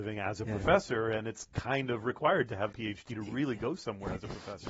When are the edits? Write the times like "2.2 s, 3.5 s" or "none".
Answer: 2.7 s